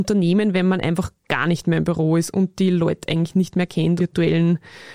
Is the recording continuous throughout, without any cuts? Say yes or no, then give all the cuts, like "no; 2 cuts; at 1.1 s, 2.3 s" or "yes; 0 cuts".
no; 1 cut; at 4.0 s